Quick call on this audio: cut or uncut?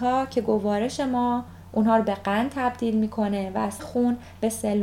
cut